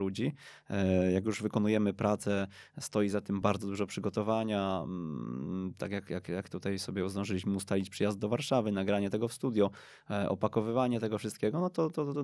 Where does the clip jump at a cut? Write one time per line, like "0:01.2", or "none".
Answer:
none